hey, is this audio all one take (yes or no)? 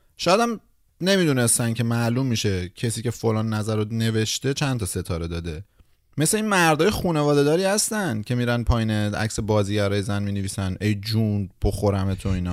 yes